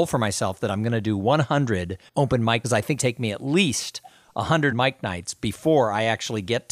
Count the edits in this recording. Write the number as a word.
four